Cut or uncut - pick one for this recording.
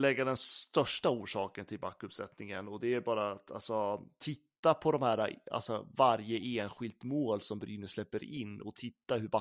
uncut